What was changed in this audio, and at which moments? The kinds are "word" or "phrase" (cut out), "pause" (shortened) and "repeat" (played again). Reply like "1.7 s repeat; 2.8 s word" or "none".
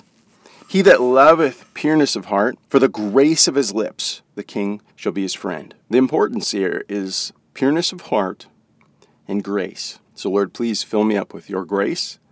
2.6 s pause; 4.3 s pause; 4.9 s pause; 5.8 s pause; 7.4 s pause; 10.1 s pause